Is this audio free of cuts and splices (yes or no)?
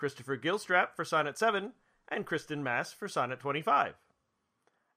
yes